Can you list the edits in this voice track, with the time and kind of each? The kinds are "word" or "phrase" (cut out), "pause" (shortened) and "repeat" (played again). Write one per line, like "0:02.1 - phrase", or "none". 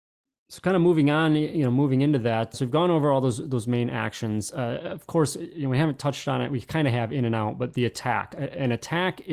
0:02.5 - word